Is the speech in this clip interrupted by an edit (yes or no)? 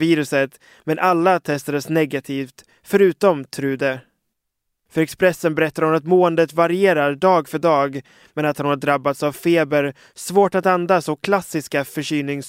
no